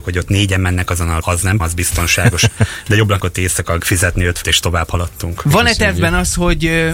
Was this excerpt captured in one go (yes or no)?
no